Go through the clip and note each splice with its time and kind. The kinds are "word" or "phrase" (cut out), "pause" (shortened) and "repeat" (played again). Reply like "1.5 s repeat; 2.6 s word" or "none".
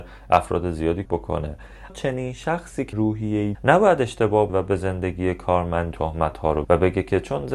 1.0 s word; 1.9 s word; 2.9 s word; 3.5 s word; 4.5 s word; 5.9 s word; 6.6 s word

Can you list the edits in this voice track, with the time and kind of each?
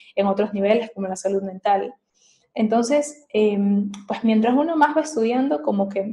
none

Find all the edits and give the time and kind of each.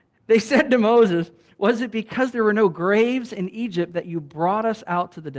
none

